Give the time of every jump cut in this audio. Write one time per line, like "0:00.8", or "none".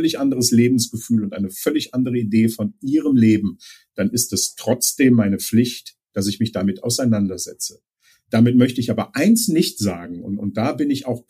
none